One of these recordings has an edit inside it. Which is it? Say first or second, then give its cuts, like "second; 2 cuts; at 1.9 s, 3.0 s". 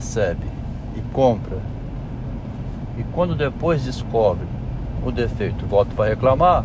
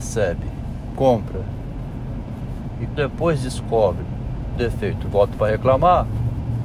second; 3 cuts; at 0.9 s, 3.0 s, 4.6 s